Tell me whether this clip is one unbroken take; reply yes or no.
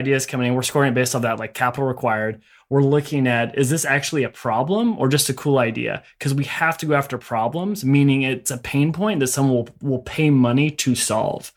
yes